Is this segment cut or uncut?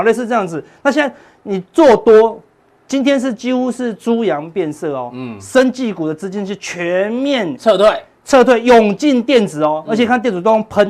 uncut